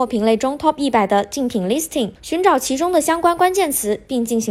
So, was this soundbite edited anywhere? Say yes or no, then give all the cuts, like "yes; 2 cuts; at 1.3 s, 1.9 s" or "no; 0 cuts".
yes; 1 cut; at 2.2 s